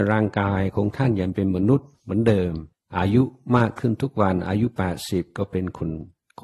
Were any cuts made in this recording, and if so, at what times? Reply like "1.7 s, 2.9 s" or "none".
1.9 s, 2.7 s